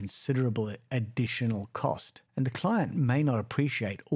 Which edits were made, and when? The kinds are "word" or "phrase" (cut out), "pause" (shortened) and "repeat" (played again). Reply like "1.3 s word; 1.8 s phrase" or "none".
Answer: 2.3 s pause